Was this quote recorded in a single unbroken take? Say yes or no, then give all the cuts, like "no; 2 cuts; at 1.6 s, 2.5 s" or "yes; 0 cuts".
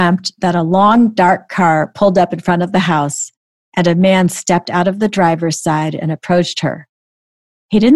yes; 0 cuts